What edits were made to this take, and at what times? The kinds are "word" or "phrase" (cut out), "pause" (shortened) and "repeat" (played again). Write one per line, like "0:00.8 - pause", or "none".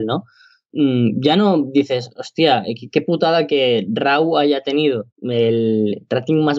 0:05.1 - pause